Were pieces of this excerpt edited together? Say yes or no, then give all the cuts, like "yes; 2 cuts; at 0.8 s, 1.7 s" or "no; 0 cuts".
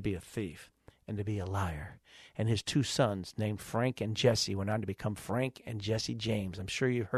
no; 0 cuts